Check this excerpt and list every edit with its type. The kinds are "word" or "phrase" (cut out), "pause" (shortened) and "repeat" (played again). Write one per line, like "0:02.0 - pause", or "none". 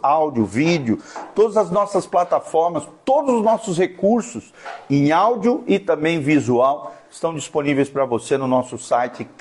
none